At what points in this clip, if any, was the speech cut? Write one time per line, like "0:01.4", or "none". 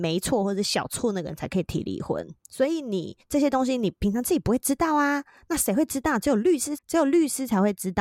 0:02.4
0:06.8